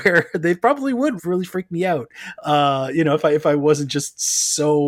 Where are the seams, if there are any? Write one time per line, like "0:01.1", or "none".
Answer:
0:01.2